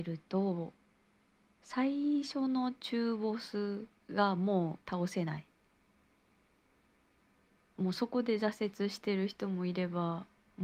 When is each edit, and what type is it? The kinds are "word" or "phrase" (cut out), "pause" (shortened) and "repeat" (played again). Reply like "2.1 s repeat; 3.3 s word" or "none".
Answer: 4.0 s pause; 4.8 s pause